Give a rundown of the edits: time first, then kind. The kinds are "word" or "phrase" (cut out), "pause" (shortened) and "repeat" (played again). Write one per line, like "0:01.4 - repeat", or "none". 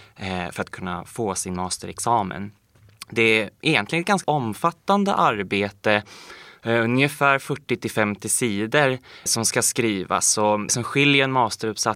0:04.2 - word
0:09.3 - word
0:10.7 - word